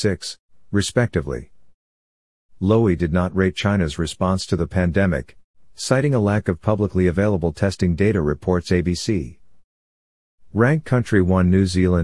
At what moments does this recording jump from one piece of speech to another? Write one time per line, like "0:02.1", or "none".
none